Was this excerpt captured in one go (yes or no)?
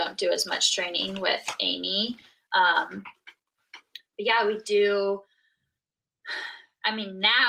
yes